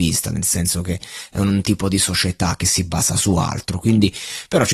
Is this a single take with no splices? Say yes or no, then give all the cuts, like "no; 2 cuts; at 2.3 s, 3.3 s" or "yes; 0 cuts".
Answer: yes; 0 cuts